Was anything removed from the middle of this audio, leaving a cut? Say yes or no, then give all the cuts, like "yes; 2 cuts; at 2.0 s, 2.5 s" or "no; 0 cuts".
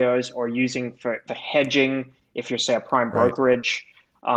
yes; 1 cut; at 1.3 s